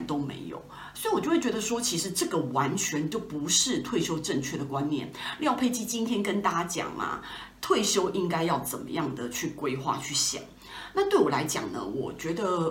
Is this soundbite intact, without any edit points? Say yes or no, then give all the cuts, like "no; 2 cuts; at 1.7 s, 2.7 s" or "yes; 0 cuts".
yes; 0 cuts